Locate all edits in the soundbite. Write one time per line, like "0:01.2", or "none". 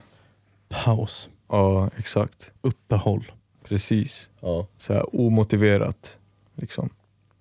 0:02.6